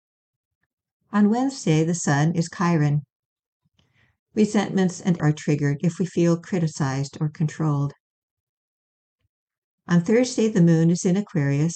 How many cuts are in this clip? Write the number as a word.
two